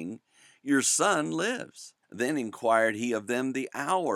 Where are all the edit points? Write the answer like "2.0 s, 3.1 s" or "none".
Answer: 2.0 s